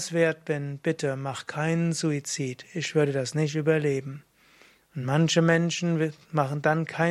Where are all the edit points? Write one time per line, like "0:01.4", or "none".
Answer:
none